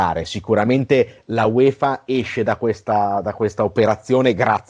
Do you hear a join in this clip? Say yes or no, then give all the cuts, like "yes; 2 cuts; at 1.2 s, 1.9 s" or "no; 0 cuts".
no; 0 cuts